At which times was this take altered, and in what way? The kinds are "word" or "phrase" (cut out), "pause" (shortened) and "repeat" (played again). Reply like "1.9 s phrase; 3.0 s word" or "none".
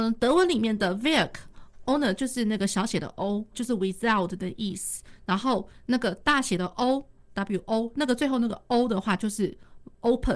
1.8 s word; 3.5 s word; 7.6 s word